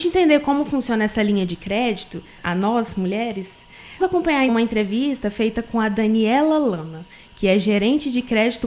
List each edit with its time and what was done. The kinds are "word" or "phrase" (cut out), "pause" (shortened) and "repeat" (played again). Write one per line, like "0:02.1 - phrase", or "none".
0:02.4 - word
0:04.0 - word
0:04.5 - word